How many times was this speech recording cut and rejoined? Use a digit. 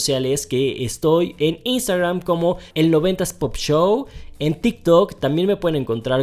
1